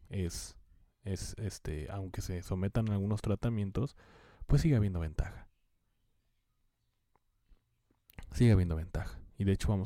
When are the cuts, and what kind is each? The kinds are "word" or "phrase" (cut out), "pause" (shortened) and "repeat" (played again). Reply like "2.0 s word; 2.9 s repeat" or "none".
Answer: none